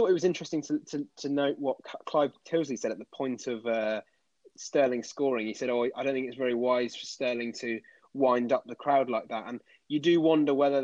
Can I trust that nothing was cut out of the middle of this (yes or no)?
yes